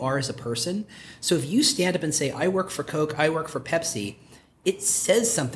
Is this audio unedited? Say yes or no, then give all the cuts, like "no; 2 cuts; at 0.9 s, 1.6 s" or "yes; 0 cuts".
yes; 0 cuts